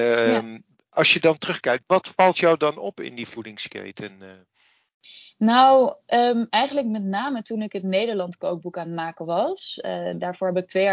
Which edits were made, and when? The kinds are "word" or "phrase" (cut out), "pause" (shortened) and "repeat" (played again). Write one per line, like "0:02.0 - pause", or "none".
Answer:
0:01.8 - word